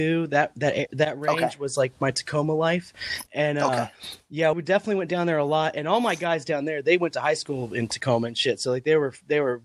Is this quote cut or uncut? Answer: cut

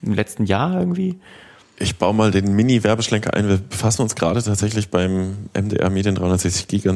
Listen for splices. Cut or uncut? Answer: uncut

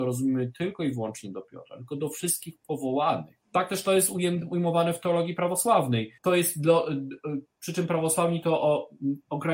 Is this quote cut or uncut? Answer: cut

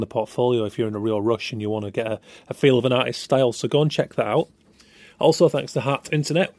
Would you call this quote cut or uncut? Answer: uncut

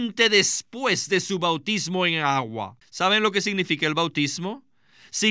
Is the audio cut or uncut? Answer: cut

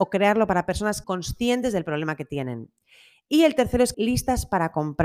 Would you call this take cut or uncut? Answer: cut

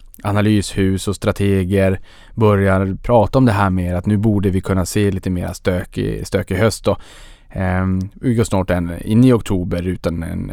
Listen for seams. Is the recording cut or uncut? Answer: uncut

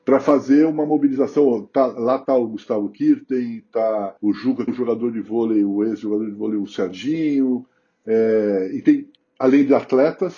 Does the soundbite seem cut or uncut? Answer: cut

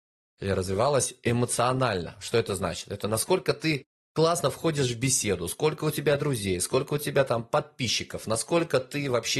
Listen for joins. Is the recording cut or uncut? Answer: uncut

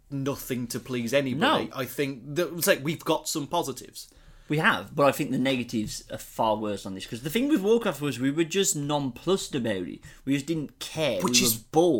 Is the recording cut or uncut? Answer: uncut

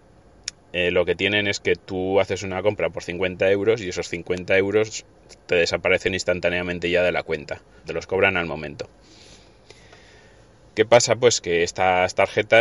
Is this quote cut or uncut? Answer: cut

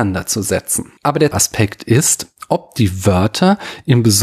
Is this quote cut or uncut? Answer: cut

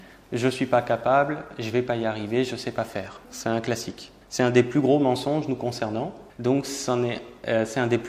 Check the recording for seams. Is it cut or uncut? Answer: cut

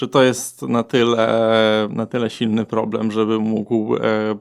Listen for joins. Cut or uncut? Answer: uncut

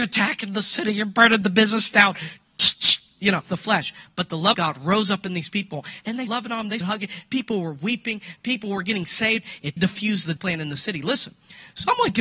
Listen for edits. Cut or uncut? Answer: cut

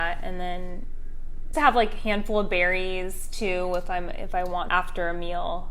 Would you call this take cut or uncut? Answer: cut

